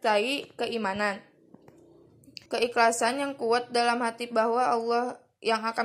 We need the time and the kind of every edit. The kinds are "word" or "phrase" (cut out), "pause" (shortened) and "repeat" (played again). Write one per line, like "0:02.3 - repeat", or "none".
0:02.5 - pause

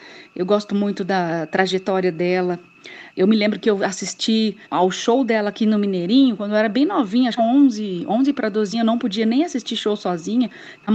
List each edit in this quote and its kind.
0:04.6 - pause
0:07.4 - phrase
0:08.7 - phrase

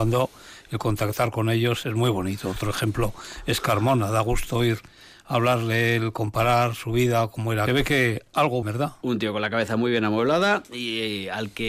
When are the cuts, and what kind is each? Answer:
0:01.8 - word
0:07.7 - phrase
0:08.6 - phrase

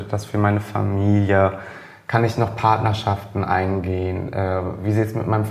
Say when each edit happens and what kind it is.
none

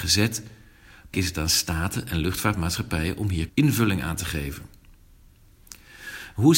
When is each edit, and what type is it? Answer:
0:01.1 - word
0:03.5 - word

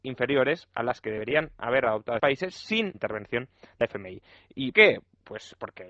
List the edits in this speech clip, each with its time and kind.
0:02.2 - word
0:02.9 - word
0:04.7 - word

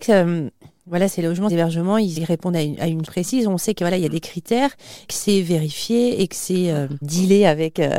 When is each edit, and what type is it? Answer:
0:01.1 - word
0:01.5 - word
0:02.2 - word
0:03.0 - word
0:05.1 - word
0:07.0 - word

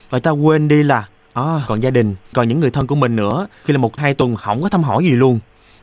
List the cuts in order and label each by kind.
0:01.7 - word
0:02.3 - word
0:03.6 - word
0:04.0 - word

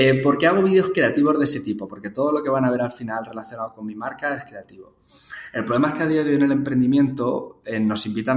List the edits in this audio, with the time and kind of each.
none

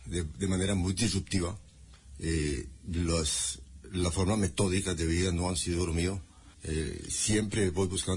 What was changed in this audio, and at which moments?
0:06.5 - pause

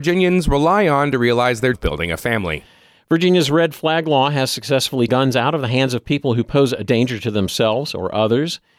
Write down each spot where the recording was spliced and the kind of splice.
0:01.7 - word
0:05.1 - word

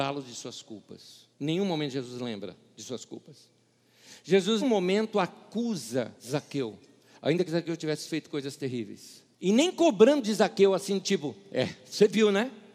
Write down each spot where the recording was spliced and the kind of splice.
0:01.3 - pause
0:04.6 - word
0:06.2 - pause
0:09.3 - pause

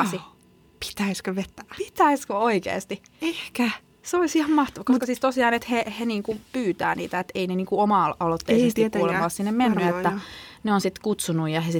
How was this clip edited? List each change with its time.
none

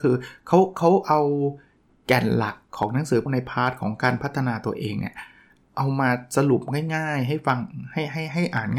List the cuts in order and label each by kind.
0:03.3 - word

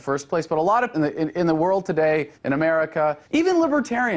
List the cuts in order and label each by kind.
0:00.9 - word
0:02.3 - pause
0:03.2 - pause

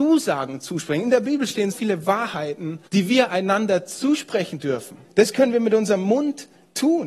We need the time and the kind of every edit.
0:01.7 - word
0:02.9 - pause
0:05.0 - pause

